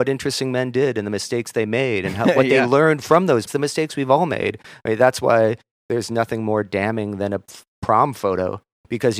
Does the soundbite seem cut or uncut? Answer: cut